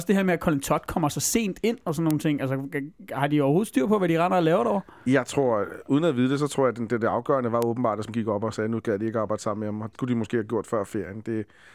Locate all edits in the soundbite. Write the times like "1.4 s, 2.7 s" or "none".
8.1 s, 9.9 s